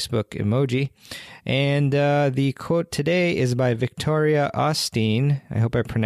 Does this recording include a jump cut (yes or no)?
no